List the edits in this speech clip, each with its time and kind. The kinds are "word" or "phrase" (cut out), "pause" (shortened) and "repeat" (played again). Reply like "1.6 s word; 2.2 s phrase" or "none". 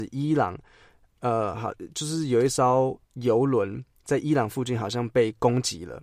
3.0 s pause